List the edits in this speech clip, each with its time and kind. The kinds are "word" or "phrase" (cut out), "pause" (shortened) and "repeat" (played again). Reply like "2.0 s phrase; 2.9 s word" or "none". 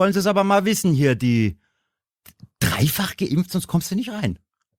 none